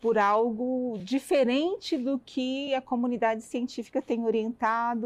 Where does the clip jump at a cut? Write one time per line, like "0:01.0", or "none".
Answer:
none